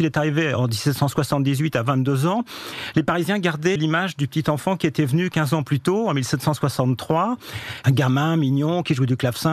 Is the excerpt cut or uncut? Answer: cut